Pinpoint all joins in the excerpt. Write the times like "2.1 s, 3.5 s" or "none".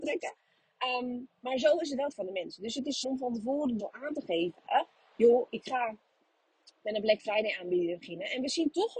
2.1 s, 3.0 s, 3.8 s